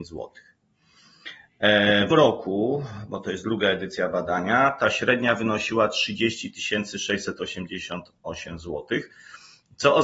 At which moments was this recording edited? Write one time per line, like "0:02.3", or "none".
0:02.1